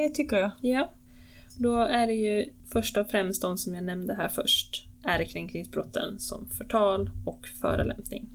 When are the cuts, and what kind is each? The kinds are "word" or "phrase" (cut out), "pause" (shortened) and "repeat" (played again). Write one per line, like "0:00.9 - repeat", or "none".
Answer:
0:04.9 - pause